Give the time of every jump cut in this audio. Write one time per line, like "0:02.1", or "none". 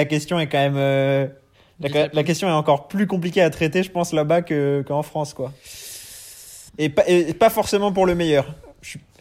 0:06.7